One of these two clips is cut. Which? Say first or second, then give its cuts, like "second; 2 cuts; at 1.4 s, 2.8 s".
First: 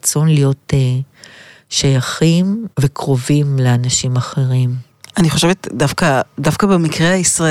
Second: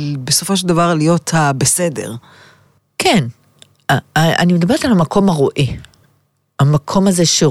first; 1 cut; at 2.7 s